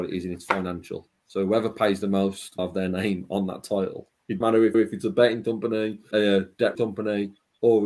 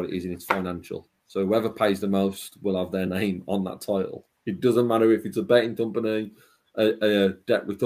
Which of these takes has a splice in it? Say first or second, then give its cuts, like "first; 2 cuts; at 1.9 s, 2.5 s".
first; 5 cuts; at 2.6 s, 4.4 s, 4.7 s, 6.1 s, 6.7 s